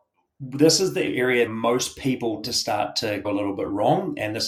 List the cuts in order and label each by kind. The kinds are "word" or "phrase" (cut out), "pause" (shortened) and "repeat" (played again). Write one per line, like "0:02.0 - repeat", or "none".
0:01.5 - word
0:02.4 - word
0:03.2 - word